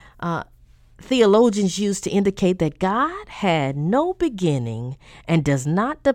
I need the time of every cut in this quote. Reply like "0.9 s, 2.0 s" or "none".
none